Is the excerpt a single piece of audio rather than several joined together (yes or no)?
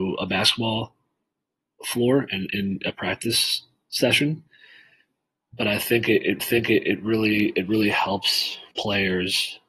no